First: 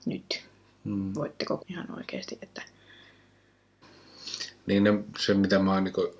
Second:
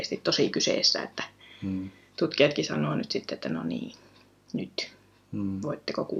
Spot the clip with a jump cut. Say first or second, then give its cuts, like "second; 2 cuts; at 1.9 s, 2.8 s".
first; 1 cut; at 1.6 s